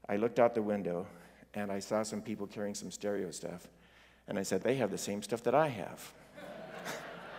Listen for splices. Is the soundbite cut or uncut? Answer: cut